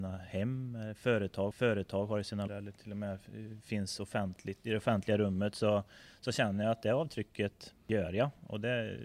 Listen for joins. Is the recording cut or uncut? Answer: cut